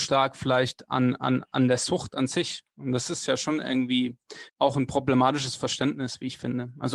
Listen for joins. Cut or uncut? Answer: cut